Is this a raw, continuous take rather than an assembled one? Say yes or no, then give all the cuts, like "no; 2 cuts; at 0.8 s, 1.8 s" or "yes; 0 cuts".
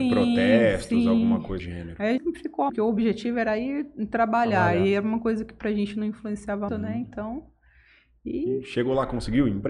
no; 4 cuts; at 1.6 s, 2.2 s, 2.7 s, 6.7 s